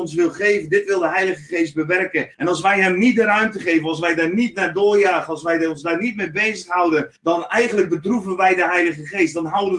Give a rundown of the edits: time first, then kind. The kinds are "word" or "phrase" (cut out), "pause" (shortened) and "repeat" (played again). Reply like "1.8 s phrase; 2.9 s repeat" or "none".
2.3 s pause; 7.2 s pause